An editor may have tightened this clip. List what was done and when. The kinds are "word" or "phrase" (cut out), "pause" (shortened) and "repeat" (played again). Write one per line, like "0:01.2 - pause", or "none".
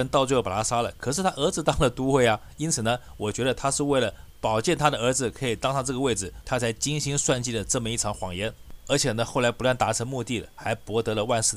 0:06.4 - phrase